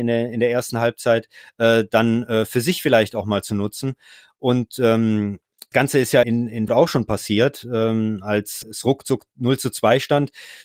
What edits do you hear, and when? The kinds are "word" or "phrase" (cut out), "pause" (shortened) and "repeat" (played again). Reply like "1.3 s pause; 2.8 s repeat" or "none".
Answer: 5.7 s word; 6.2 s word; 6.7 s word; 8.6 s word